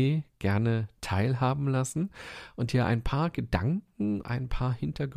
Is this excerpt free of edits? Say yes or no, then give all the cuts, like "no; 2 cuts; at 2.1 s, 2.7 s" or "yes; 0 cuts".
no; 1 cut; at 4.2 s